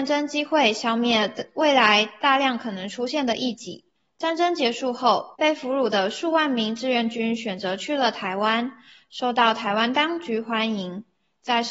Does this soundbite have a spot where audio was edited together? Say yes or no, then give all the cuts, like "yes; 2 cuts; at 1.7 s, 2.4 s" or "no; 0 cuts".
yes; 2 cuts; at 4.0 s, 5.4 s